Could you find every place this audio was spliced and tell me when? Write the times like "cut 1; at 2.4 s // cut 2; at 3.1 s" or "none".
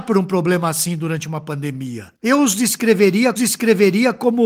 cut 1; at 2.2 s // cut 2; at 3.4 s

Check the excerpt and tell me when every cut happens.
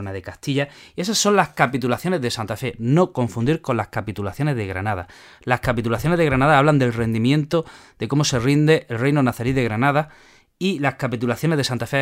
none

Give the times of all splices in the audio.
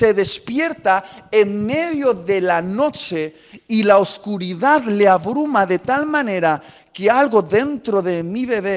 none

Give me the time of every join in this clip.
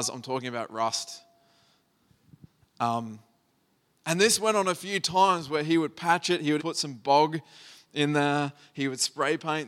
cut 1; at 6.6 s

